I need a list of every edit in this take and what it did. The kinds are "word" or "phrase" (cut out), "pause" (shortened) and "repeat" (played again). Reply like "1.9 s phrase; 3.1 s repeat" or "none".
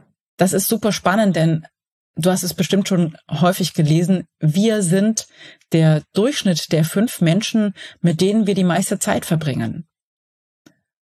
none